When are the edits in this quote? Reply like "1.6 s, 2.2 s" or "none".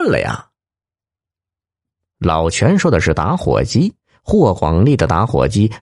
4.0 s